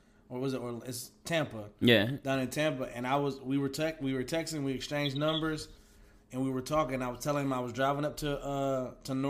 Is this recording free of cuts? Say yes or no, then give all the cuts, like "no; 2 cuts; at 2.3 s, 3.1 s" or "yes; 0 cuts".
yes; 0 cuts